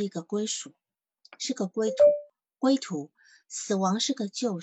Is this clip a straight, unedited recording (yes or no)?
yes